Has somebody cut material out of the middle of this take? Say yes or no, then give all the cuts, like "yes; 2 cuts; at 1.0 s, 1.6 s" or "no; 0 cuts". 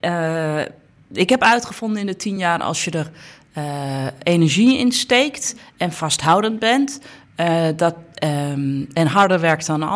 no; 0 cuts